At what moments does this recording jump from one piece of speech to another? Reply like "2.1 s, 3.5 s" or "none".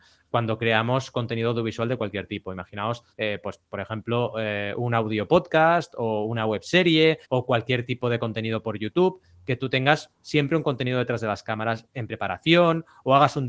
3.1 s, 7.2 s